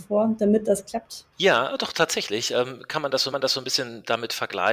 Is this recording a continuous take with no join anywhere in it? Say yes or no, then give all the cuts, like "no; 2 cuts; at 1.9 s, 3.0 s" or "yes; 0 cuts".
no; 2 cuts; at 1.3 s, 3.3 s